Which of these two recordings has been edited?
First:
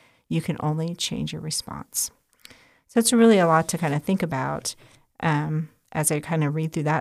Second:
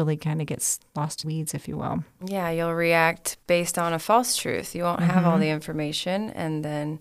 second; 2 cuts; at 1.2 s, 3.4 s

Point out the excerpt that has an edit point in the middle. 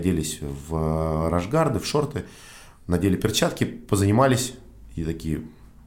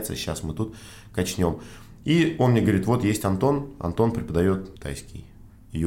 second; 1 cut; at 4.8 s

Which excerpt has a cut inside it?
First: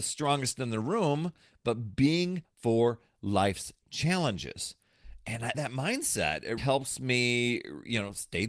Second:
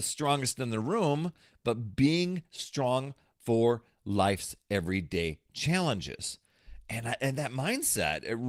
first; 4 cuts; at 2.4 s, 3.8 s, 5.5 s, 6.6 s

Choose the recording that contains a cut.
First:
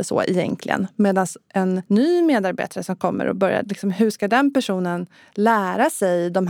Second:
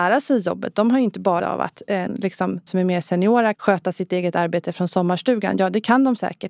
second; 4 cuts; at 1.4 s, 2.1 s, 2.7 s, 3.5 s

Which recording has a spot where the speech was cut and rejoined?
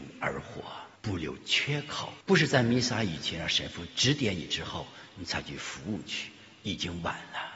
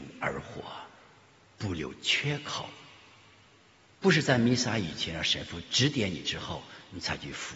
first; 2 cuts; at 1.0 s, 2.2 s

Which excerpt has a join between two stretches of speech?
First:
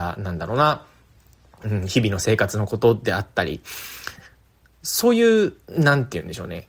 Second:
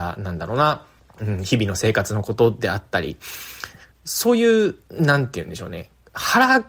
second; 2 cuts; at 1.0 s, 3.9 s

